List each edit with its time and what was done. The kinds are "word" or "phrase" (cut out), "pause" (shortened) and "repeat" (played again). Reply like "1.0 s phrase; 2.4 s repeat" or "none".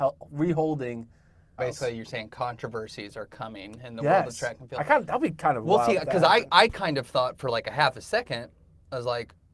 1.6 s word